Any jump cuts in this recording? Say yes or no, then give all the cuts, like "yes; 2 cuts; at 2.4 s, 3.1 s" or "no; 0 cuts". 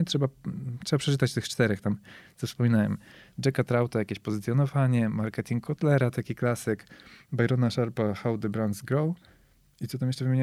no; 0 cuts